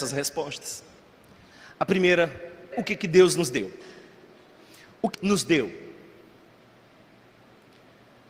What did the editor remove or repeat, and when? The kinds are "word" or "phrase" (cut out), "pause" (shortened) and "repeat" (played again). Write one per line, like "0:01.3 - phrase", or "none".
0:02.7 - word
0:05.1 - word